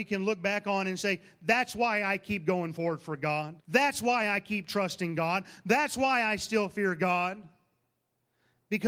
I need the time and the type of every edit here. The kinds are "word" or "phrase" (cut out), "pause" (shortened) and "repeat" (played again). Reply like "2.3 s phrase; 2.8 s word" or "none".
3.6 s pause